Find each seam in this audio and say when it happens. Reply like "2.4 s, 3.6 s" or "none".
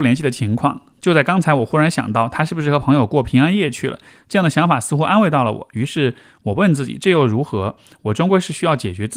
none